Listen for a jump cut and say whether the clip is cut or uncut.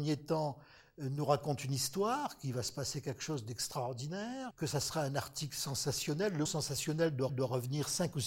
cut